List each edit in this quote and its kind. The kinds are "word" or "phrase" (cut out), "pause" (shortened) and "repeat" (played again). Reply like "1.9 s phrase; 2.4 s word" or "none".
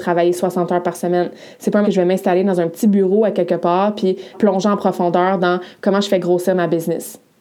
1.8 s word; 4.3 s word

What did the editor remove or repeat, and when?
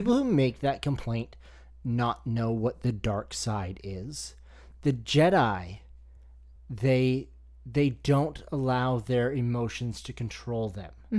none

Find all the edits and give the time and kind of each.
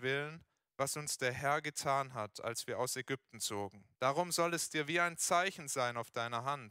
3.9 s pause

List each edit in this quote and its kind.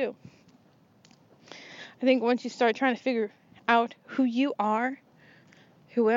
none

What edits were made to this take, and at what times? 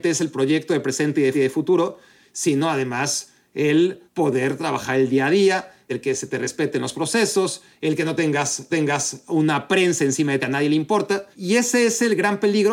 1.3 s repeat; 4.1 s pause; 8.7 s repeat; 10.4 s phrase; 11.3 s pause

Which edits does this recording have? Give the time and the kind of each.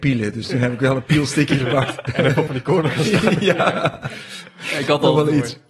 2.5 s phrase

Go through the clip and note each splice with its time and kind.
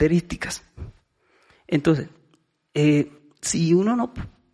none

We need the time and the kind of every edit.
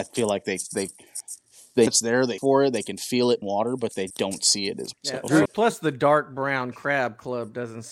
1.9 s word; 2.4 s word; 3.4 s word; 4.1 s word; 4.9 s word; 5.5 s word

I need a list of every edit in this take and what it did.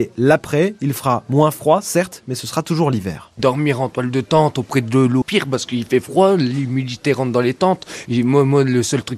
5.2 s phrase

